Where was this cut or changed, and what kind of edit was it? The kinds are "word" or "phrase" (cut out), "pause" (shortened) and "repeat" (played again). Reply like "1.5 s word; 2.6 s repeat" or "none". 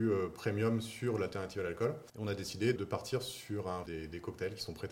2.1 s pause; 2.8 s word; 3.9 s phrase